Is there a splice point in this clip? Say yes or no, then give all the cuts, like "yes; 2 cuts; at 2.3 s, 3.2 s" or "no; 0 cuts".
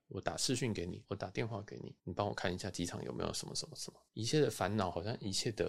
yes; 3 cuts; at 1.0 s, 2.0 s, 4.1 s